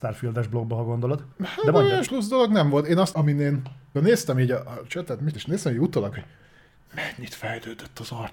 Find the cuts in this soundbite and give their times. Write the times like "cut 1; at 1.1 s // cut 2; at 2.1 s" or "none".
cut 1; at 1.3 s // cut 2; at 2.1 s // cut 3; at 3.1 s // cut 4; at 3.9 s // cut 5; at 4.9 s // cut 6; at 5.3 s // cut 7; at 6.1 s